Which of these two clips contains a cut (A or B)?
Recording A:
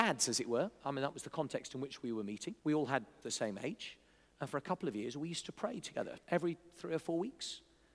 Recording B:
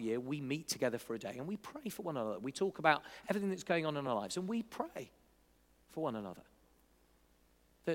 A